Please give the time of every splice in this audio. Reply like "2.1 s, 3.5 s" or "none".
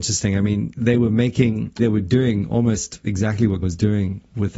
1.8 s, 3.6 s